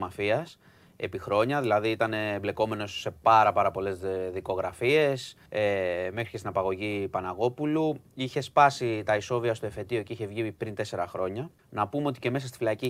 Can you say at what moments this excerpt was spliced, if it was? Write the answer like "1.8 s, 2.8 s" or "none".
5.5 s, 11.6 s